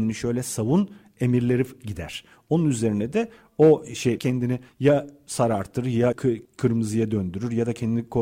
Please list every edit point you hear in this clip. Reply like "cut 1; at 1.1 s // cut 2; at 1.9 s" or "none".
cut 1; at 4.2 s // cut 2; at 6.1 s